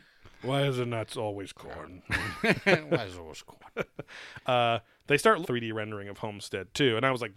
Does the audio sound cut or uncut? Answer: cut